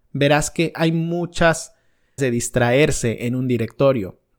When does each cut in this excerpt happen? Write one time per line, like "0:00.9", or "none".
0:02.2